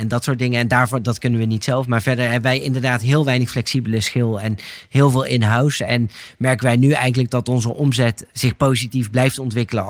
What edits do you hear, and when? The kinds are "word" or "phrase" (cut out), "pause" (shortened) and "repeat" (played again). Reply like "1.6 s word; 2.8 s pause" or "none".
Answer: 8.3 s word